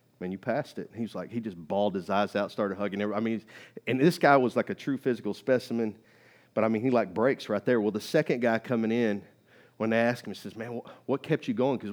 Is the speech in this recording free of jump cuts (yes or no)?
yes